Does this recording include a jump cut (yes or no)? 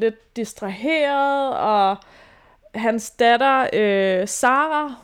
no